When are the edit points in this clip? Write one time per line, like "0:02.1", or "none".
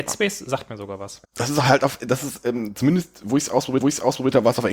0:01.2
0:03.8